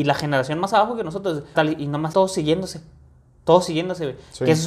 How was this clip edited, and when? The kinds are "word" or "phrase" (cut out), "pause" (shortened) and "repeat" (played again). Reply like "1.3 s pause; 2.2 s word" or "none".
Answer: 1.5 s phrase; 2.1 s word

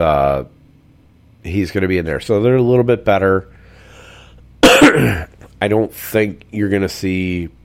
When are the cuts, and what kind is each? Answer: none

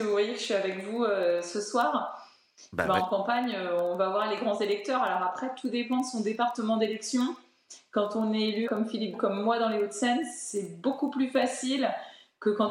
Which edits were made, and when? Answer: 8.7 s word; 9.1 s phrase

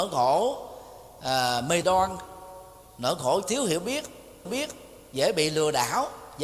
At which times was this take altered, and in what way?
1.8 s phrase; 3.4 s word; 4.5 s repeat

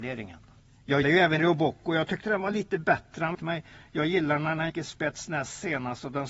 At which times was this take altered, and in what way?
1.0 s word; 1.4 s word; 3.3 s phrase; 4.7 s word

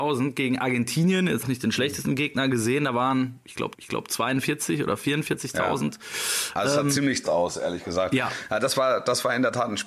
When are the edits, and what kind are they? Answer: 1.4 s word; 3.7 s repeat; 7.2 s word

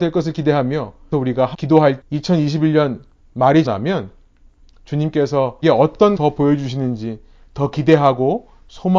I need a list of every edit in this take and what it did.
1.1 s word; 1.5 s word; 2.0 s word; 3.7 s word; 5.6 s word; 6.2 s word

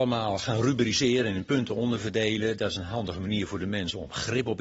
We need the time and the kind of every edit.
none

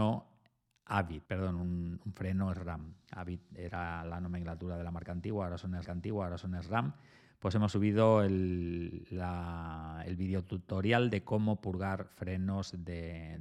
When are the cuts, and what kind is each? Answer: 1.3 s pause; 5.8 s repeat

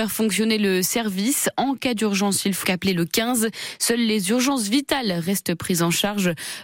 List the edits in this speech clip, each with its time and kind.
2.6 s word

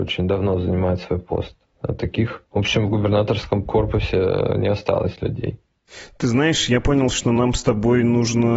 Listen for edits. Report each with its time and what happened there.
none

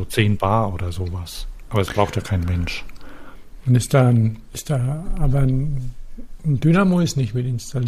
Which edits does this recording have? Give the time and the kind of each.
none

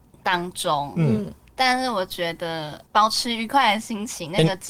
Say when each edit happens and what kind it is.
2.9 s pause

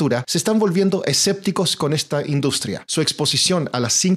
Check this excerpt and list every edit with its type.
none

